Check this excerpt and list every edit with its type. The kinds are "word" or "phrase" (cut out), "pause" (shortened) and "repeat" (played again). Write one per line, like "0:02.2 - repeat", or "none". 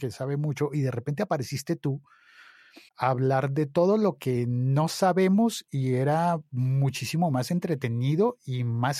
0:02.9 - pause

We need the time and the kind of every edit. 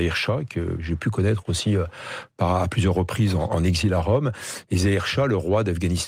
none

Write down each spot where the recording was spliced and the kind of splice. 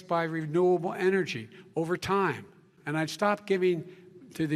none

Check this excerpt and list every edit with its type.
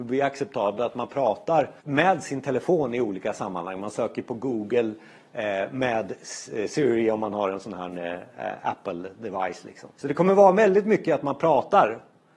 0:01.8 - pause
0:09.9 - pause

